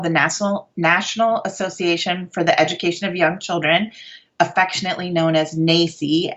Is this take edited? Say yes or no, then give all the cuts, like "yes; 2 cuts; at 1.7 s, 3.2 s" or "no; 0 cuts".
no; 0 cuts